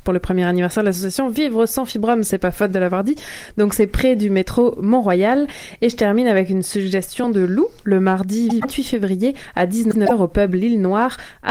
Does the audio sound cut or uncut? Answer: uncut